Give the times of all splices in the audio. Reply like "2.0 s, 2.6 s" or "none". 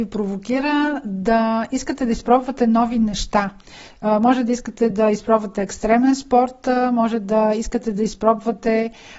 none